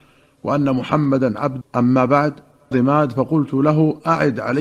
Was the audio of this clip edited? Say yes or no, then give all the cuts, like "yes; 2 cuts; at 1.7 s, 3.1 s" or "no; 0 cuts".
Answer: yes; 2 cuts; at 1.6 s, 2.7 s